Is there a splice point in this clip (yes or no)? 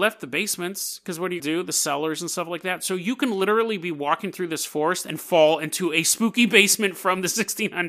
yes